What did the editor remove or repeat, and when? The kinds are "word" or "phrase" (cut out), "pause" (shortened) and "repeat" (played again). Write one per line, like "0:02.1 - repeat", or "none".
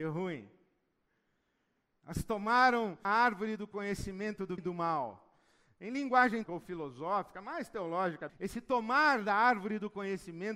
0:03.0 - word
0:04.6 - word
0:06.5 - word
0:08.3 - word